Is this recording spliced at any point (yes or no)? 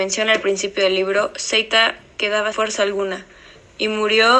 yes